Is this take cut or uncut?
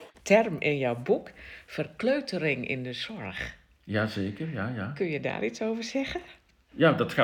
uncut